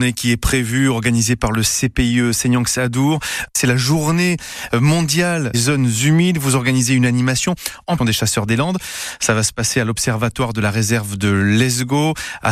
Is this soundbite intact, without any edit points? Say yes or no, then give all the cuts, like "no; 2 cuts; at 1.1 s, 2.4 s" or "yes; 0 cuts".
no; 2 cuts; at 5.5 s, 8.0 s